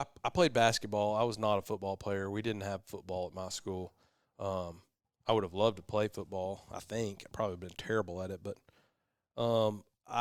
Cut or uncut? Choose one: uncut